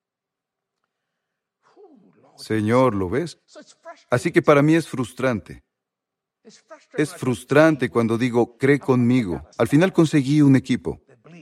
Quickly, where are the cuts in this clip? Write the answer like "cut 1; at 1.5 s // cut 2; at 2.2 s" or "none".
cut 1; at 9.5 s